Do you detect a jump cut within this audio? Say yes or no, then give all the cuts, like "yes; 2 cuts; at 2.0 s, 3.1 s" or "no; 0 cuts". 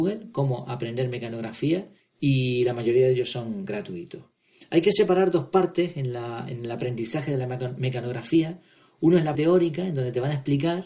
yes; 2 cuts; at 2.0 s, 9.3 s